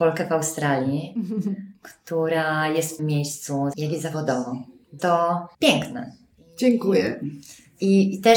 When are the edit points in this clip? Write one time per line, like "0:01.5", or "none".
0:03.0
0:03.7
0:05.0
0:05.5